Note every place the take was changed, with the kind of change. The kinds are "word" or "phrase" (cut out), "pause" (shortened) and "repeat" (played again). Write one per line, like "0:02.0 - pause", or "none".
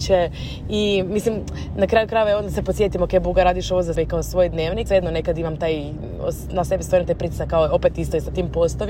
0:03.9 - word
0:04.9 - word
0:06.7 - word